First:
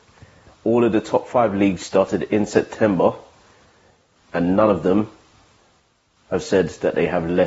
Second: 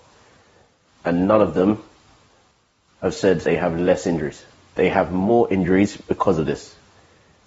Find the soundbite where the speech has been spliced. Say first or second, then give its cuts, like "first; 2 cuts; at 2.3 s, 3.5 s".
second; 1 cut; at 3.4 s